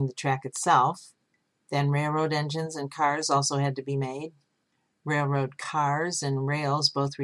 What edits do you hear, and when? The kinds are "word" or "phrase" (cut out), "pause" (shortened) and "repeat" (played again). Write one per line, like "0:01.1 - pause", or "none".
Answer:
none